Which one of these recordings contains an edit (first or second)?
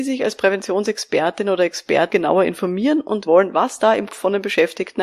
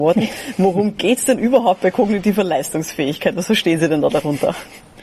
first